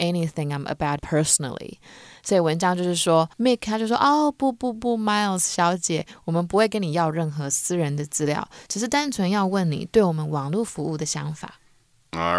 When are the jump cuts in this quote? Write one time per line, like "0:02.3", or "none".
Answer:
0:01.0
0:03.3